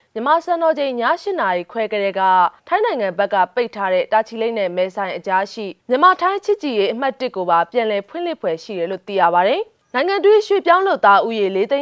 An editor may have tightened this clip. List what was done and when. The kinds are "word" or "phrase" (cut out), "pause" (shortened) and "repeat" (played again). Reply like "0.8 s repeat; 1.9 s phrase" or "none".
2.6 s pause; 5.8 s pause